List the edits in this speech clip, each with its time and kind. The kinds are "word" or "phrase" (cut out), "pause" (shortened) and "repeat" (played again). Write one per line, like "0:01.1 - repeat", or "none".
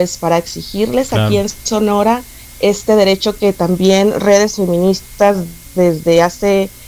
none